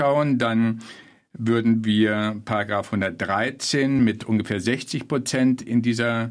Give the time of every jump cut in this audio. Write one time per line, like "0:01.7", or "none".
none